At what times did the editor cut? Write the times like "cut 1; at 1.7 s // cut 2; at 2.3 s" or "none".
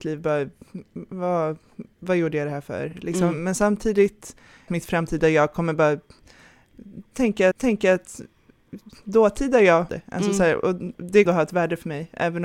cut 1; at 4.7 s // cut 2; at 7.5 s // cut 3; at 9.9 s // cut 4; at 11.3 s